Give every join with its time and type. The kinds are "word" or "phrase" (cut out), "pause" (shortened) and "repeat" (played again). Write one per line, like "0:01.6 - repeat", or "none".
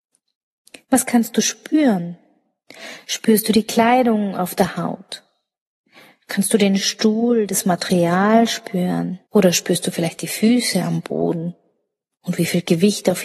0:09.2 - pause

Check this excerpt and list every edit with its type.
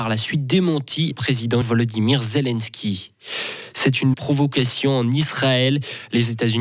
0:01.1 - word
0:01.6 - word
0:04.1 - word

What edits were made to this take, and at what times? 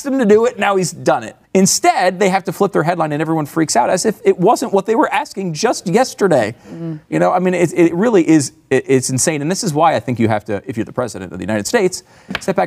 0:01.4 - pause

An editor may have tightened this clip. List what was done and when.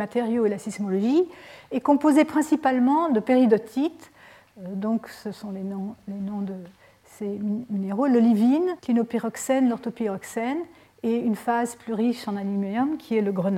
0:08.8 - pause

